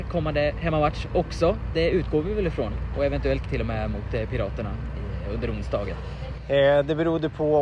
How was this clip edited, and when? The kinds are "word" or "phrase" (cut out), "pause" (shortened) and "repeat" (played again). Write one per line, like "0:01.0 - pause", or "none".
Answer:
0:03.4 - word